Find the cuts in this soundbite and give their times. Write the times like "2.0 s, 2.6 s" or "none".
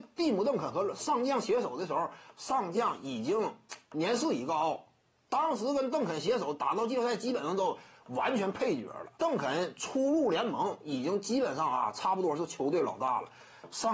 9.2 s